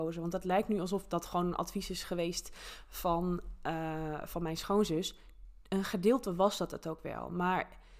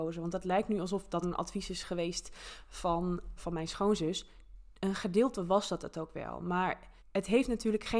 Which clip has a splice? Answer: second; 3 cuts; at 1.2 s, 3.4 s, 7.0 s

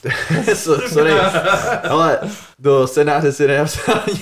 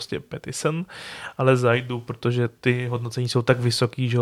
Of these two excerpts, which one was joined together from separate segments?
first; 1 cut; at 2.5 s

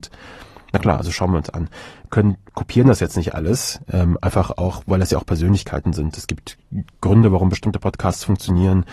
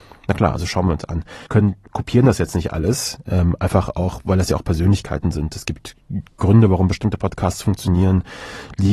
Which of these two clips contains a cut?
second; 1 cut; at 1.5 s

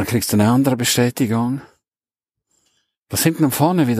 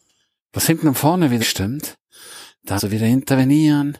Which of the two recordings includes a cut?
second; 2 cuts; at 1.4 s, 2.8 s

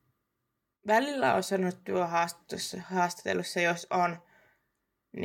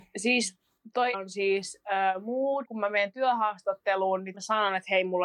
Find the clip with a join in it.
second; 3 cuts; at 1.1 s, 2.6 s, 4.3 s

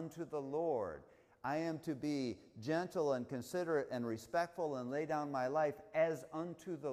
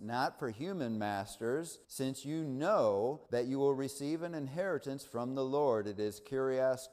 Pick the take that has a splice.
second; 2 cuts; at 1.8 s, 3.3 s

